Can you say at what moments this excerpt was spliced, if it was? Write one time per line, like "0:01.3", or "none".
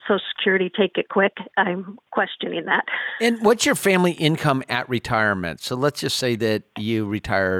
none